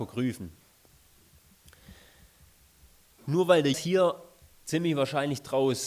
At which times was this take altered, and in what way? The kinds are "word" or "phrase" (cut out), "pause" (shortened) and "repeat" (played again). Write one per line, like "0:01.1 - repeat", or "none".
0:03.7 - word